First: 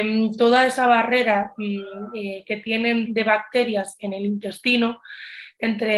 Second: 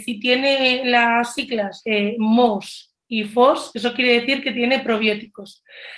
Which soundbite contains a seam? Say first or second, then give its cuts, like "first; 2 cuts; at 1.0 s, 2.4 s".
first; 1 cut; at 3.0 s